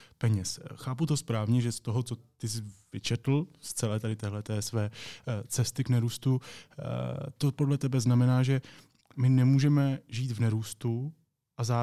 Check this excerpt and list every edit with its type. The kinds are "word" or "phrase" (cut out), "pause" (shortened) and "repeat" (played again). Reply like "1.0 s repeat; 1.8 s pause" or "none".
none

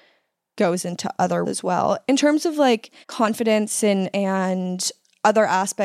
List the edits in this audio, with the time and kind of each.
1.4 s word; 3.0 s pause; 4.1 s word

